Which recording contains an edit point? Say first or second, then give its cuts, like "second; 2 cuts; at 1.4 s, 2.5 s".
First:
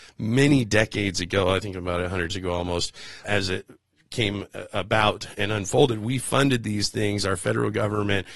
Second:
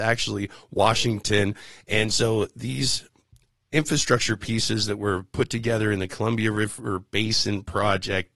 first; 3 cuts; at 2.3 s, 3.2 s, 5.3 s